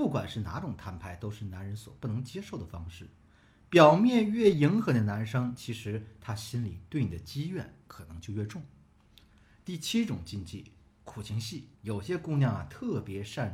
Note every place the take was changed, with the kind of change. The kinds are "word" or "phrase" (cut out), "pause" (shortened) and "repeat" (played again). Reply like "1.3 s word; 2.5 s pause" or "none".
11.8 s pause